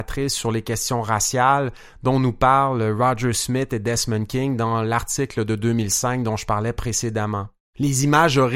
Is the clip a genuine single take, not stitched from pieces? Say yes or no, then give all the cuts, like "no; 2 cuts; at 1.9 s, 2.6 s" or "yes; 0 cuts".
yes; 0 cuts